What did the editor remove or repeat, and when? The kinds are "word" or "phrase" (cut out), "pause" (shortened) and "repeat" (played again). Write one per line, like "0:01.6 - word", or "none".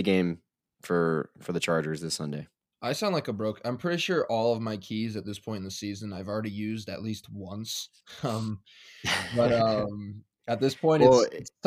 none